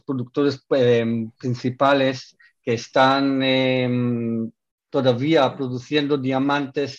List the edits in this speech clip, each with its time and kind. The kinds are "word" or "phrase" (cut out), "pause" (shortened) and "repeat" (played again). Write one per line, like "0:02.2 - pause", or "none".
none